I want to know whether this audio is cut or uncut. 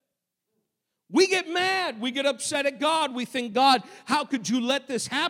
uncut